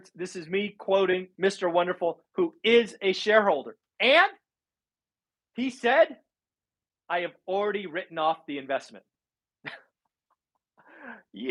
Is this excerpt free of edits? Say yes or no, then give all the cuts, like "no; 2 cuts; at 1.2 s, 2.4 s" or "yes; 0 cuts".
yes; 0 cuts